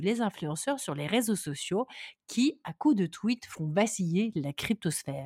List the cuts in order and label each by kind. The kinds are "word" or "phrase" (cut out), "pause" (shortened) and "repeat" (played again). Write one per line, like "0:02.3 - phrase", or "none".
none